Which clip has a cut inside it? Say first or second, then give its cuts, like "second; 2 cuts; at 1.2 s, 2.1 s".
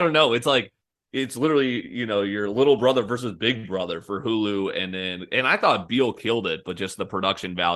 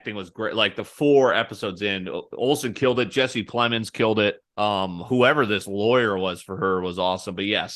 second; 1 cut; at 4.5 s